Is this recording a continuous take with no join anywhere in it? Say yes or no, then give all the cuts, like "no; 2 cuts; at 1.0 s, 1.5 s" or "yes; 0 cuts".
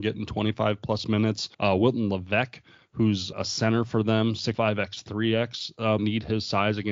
no; 4 cuts; at 1.5 s, 3.3 s, 4.5 s, 6.0 s